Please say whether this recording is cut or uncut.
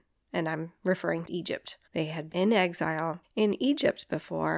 cut